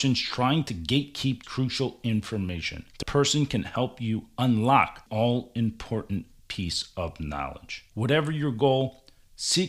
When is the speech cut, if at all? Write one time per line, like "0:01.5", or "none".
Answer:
0:01.4
0:03.0
0:05.1